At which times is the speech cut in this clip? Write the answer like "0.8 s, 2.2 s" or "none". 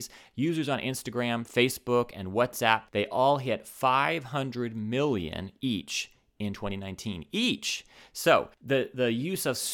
2.9 s, 8.5 s